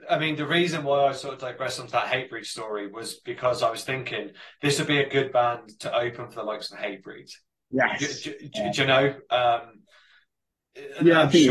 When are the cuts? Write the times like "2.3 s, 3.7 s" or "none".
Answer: none